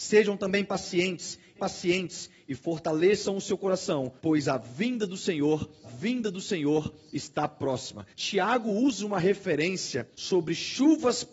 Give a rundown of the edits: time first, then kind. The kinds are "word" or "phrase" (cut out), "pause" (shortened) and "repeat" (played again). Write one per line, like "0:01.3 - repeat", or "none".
0:01.6 - repeat
0:04.2 - pause
0:05.8 - repeat
0:08.1 - pause
0:10.1 - pause